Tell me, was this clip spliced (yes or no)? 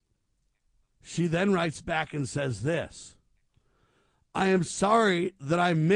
no